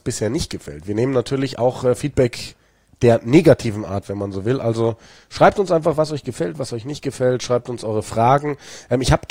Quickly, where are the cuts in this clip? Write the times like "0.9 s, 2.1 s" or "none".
none